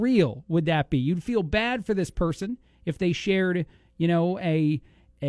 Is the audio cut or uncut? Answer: uncut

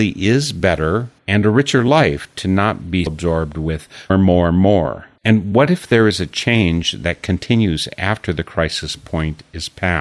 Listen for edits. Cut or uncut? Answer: cut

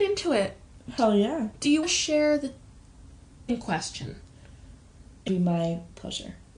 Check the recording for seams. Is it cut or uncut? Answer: cut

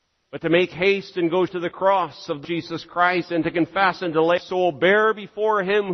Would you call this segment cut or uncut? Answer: cut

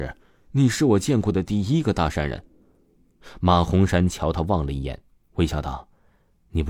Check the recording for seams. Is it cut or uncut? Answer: uncut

